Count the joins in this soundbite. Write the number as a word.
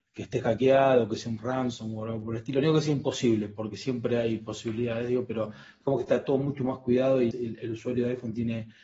one